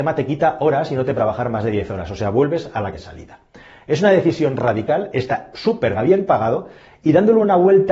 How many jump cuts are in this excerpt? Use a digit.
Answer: 3